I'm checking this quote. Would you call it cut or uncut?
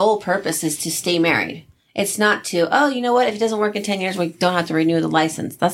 uncut